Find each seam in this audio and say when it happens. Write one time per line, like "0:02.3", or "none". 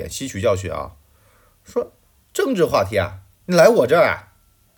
0:02.3
0:03.3